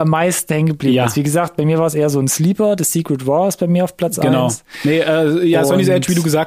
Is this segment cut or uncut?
uncut